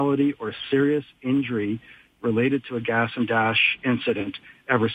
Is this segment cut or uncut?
uncut